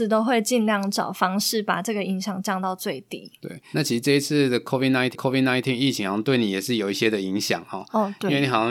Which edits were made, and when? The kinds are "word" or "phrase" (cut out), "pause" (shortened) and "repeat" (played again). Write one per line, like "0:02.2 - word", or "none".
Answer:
0:03.7 - word
0:05.1 - repeat